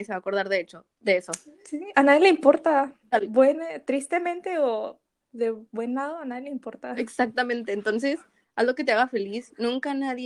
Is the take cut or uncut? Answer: uncut